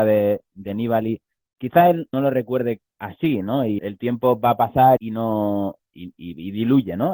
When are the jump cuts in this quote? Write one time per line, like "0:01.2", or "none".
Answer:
0:01.4
0:02.1
0:03.8
0:05.0